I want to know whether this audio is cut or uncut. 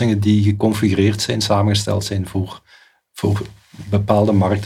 uncut